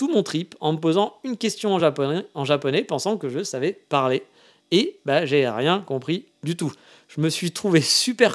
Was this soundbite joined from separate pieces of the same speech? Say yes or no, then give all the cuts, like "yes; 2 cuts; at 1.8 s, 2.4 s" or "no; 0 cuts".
no; 0 cuts